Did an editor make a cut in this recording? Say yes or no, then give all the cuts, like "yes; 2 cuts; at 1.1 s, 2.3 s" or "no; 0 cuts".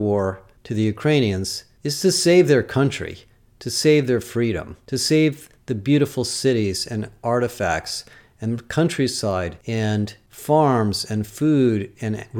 no; 0 cuts